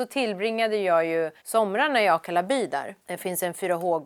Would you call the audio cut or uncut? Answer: cut